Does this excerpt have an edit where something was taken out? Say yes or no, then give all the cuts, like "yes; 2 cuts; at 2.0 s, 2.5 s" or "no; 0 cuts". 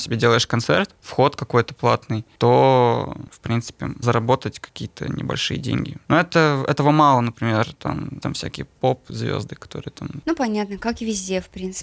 yes; 2 cuts; at 4.0 s, 8.2 s